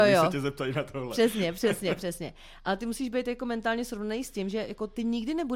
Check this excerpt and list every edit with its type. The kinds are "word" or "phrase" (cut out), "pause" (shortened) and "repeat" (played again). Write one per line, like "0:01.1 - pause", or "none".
none